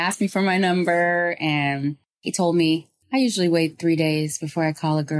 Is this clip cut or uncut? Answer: uncut